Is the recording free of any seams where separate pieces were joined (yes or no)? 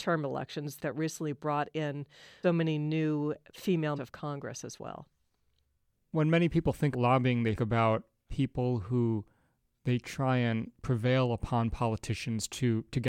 no